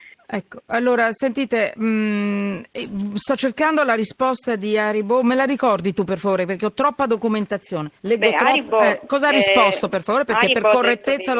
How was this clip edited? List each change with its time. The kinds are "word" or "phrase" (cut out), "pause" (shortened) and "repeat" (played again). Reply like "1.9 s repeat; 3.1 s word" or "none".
8.0 s pause